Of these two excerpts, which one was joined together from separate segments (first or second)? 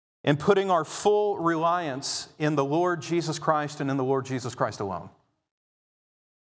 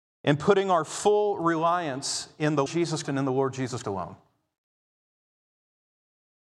second